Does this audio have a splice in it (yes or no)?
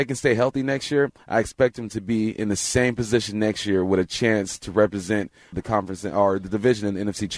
yes